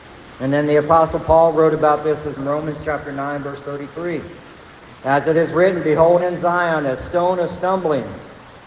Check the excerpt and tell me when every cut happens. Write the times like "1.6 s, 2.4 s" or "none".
2.4 s, 6.2 s